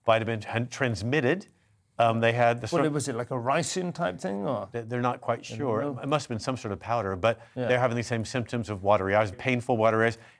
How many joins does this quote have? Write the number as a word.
one